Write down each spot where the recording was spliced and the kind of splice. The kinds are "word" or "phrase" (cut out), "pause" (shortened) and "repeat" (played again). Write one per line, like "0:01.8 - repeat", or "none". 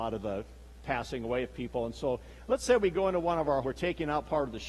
0:03.6 - phrase